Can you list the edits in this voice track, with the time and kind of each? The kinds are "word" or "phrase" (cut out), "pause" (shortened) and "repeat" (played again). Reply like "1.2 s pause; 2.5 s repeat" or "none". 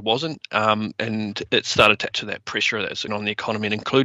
2.1 s word; 3.1 s word